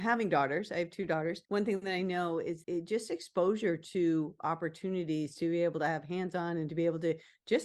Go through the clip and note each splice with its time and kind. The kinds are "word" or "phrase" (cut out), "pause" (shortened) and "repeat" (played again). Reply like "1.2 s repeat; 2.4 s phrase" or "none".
1.4 s pause; 2.6 s word